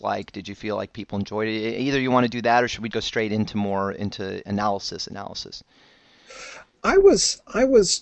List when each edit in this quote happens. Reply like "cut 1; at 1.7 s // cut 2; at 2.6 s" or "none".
cut 1; at 2.9 s